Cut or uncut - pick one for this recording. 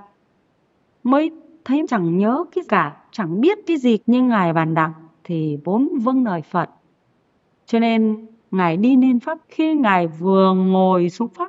cut